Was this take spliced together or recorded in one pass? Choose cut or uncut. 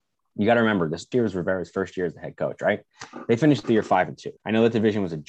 cut